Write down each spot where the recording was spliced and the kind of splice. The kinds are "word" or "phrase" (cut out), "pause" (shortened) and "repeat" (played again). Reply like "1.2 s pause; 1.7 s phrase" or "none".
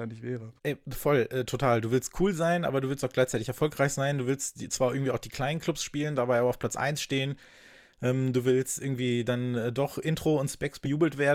none